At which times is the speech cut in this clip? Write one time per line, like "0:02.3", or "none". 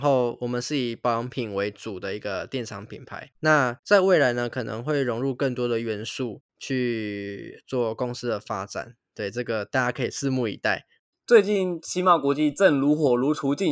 0:06.5
0:11.1